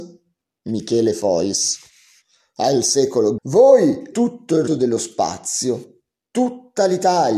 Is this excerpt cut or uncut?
cut